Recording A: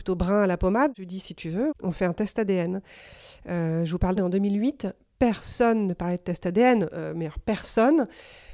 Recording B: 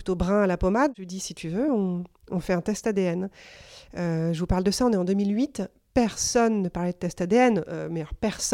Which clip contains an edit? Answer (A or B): A